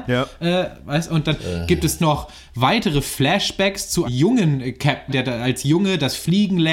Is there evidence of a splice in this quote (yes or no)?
yes